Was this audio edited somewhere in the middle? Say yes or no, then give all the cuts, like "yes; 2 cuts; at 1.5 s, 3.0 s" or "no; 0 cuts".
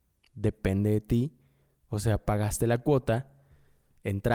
no; 0 cuts